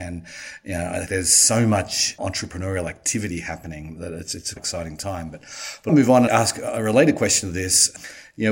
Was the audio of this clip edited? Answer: yes; 5 cuts; at 1.1 s, 4.0 s, 4.6 s, 5.9 s, 6.3 s

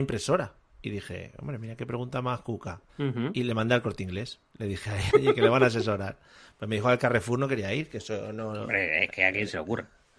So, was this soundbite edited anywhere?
yes; 2 cuts; at 2.9 s, 5.1 s

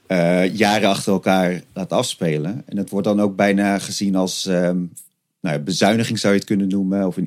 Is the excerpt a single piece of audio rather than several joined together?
yes; 0 cuts

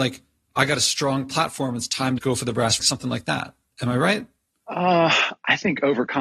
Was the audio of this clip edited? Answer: yes; 2 cuts; at 2.2 s, 2.8 s

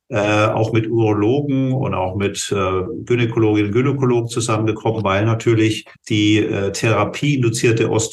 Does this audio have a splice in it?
yes; 1 cut; at 6.0 s

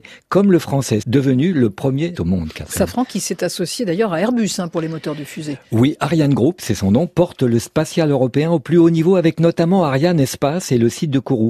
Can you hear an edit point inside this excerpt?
yes; 2 cuts; at 1.0 s, 2.1 s

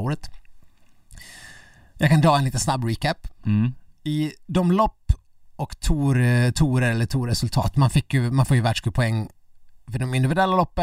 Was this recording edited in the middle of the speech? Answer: no; 0 cuts

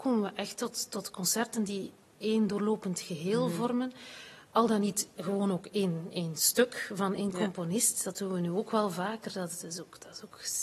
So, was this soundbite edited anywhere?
no; 0 cuts

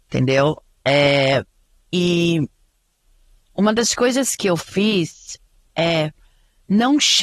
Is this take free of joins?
yes; 0 cuts

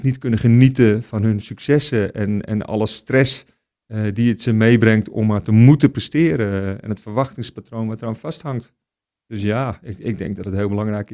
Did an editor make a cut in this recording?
no; 0 cuts

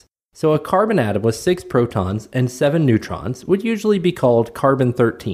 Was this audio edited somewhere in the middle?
no; 0 cuts

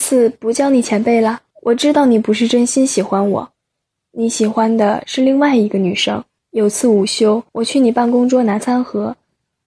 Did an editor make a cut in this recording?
yes; 3 cuts; at 1.5 s, 6.4 s, 7.5 s

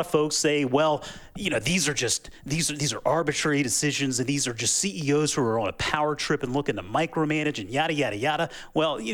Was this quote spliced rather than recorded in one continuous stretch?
no; 0 cuts

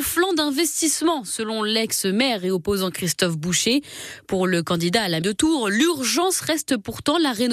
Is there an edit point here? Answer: yes; 1 cut; at 5.2 s

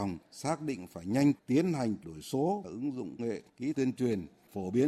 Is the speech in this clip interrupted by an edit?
yes; 5 cuts; at 1.3 s, 2.0 s, 2.6 s, 3.2 s, 3.7 s

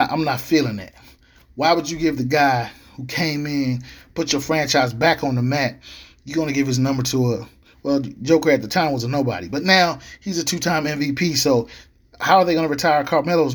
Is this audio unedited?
yes; 0 cuts

